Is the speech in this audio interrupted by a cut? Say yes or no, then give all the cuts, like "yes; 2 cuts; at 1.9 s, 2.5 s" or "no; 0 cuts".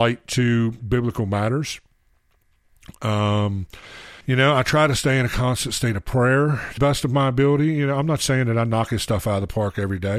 yes; 2 cuts; at 4.2 s, 6.8 s